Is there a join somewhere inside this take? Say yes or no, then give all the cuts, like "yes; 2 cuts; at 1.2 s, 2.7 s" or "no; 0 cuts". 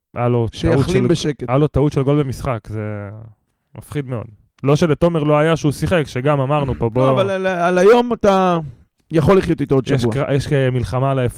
no; 0 cuts